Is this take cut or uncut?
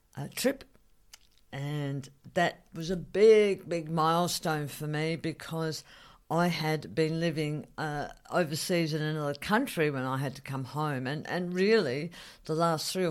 uncut